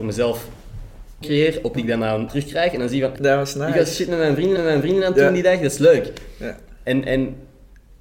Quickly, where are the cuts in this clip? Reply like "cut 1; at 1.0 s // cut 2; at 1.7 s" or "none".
cut 1; at 1.2 s // cut 2; at 1.8 s // cut 3; at 2.3 s // cut 4; at 3.2 s // cut 5; at 4.6 s